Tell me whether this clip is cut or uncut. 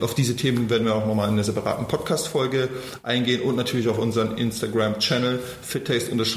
uncut